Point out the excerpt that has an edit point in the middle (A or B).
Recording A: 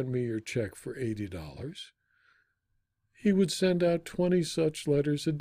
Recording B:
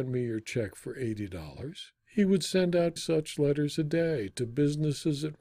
B